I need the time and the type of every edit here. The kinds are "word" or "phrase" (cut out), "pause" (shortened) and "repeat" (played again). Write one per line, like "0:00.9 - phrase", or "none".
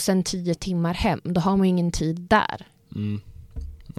none